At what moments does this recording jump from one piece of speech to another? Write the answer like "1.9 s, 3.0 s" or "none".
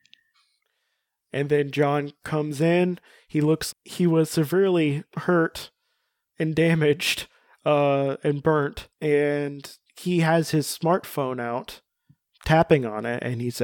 3.7 s, 8.9 s